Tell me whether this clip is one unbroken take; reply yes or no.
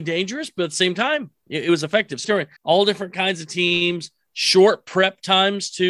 no